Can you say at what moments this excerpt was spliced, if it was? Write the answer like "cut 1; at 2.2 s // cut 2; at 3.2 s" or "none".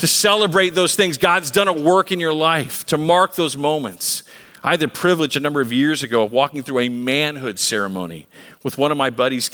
none